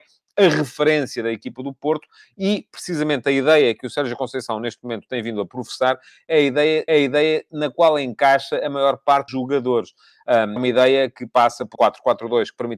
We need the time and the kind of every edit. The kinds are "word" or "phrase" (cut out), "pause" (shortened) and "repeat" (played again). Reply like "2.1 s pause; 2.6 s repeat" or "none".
6.9 s repeat; 9.3 s word; 10.6 s phrase; 11.8 s word